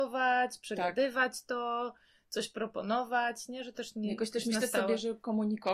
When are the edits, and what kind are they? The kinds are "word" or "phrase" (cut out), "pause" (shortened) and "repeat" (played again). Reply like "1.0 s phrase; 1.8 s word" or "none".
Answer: 3.7 s word